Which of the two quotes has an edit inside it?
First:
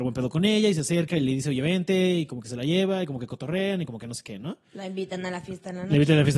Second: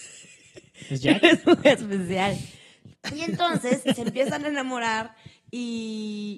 second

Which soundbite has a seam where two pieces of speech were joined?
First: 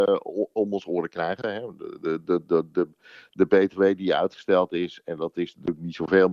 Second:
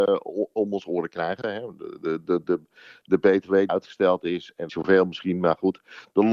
second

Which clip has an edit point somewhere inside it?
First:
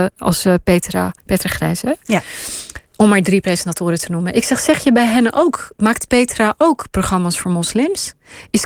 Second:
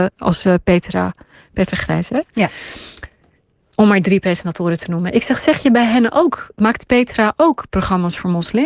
first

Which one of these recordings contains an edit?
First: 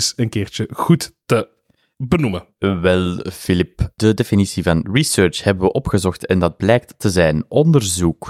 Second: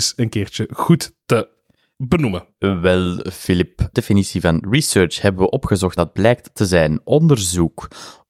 second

